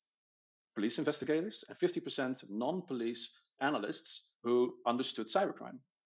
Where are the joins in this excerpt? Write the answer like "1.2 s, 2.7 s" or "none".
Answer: 3.6 s, 4.3 s